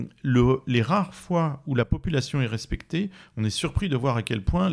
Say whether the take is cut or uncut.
uncut